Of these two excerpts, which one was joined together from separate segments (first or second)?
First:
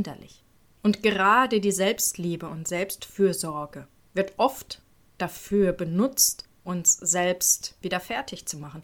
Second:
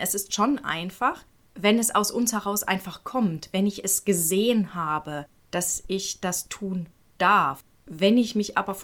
first